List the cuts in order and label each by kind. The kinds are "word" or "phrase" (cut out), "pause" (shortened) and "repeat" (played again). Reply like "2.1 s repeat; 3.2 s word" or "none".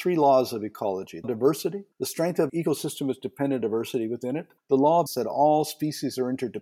1.2 s word; 1.9 s pause; 2.5 s word; 3.6 s word; 4.6 s pause; 5.1 s word